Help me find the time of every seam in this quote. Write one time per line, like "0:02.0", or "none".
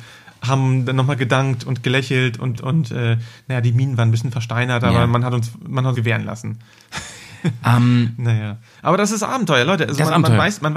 0:02.6
0:05.9